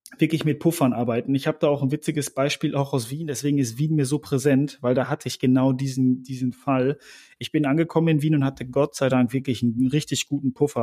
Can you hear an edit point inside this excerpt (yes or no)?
no